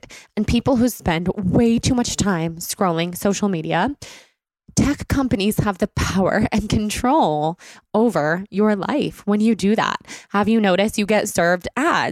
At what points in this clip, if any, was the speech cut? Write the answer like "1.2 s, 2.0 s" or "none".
none